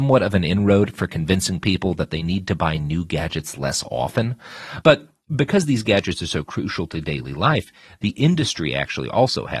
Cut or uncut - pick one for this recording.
uncut